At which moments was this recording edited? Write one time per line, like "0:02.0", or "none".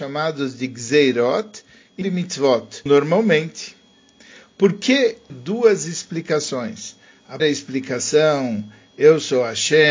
0:02.0
0:02.9
0:05.3
0:07.4